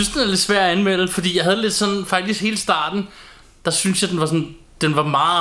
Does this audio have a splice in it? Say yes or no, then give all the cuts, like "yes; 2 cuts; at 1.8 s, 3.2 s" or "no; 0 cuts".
no; 0 cuts